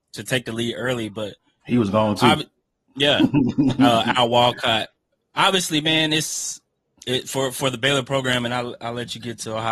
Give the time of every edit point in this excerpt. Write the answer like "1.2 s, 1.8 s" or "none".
none